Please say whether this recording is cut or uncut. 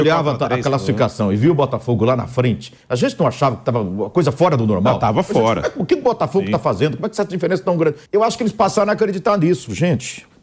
cut